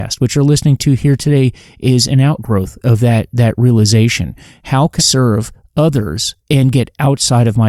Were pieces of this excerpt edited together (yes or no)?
yes